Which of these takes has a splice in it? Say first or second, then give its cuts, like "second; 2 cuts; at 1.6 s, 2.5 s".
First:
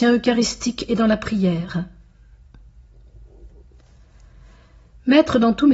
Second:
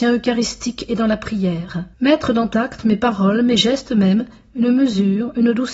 second; 2 cuts; at 1.9 s, 2.5 s